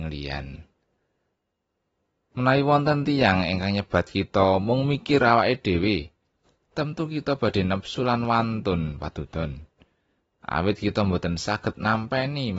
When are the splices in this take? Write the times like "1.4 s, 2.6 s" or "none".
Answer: none